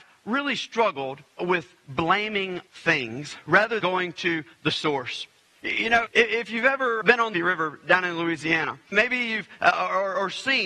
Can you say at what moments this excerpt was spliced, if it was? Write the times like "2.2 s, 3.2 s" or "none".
1.4 s, 2.7 s, 3.8 s, 6.1 s, 7.0 s, 7.3 s, 8.9 s, 9.6 s